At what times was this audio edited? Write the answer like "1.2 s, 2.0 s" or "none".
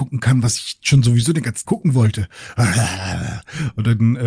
1.6 s